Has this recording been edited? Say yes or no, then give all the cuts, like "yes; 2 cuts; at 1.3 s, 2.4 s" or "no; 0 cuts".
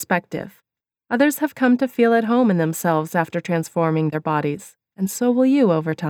no; 0 cuts